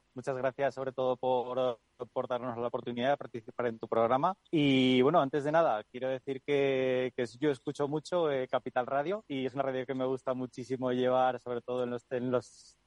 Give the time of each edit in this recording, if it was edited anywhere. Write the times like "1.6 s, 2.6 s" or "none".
4.4 s